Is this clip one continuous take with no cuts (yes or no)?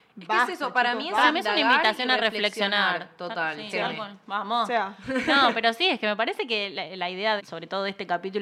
no